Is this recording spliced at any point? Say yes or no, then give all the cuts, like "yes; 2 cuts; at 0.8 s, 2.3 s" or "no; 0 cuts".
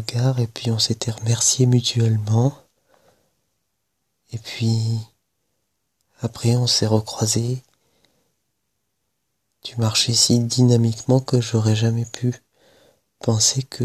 no; 0 cuts